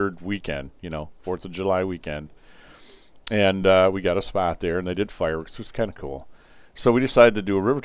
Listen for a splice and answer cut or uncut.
uncut